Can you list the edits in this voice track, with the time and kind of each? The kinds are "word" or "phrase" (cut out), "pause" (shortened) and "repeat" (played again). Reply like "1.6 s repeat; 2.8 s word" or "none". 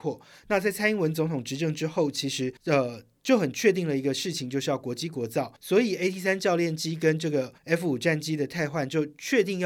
2.6 s pause; 5.6 s pause; 7.6 s pause